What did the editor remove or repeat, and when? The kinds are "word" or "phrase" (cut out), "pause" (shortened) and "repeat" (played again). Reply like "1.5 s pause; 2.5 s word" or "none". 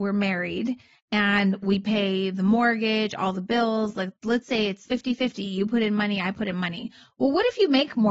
4.9 s word